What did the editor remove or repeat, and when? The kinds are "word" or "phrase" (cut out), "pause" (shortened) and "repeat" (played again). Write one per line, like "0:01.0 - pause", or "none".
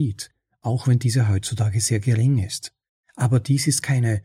none

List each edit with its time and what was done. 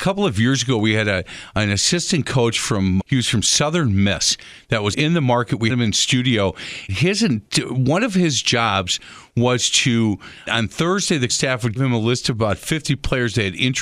0:03.0 - word
0:04.9 - word
0:05.7 - word
0:06.9 - word
0:10.5 - word
0:11.3 - word
0:11.8 - word

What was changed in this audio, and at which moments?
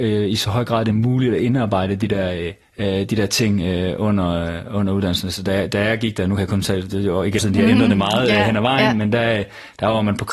0:02.6 - pause
0:07.4 - phrase

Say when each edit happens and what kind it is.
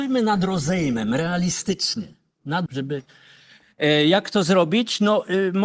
0:02.7 - word

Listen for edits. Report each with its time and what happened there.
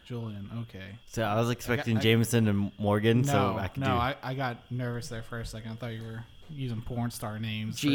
0:01.0 - pause

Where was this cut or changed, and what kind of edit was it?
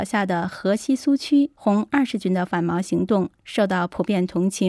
0:01.6 - pause

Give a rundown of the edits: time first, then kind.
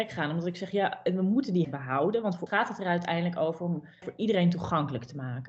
0:01.6 - word
0:02.5 - word
0:04.0 - word

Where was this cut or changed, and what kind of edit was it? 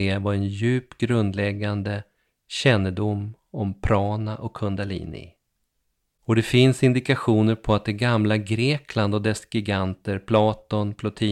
none

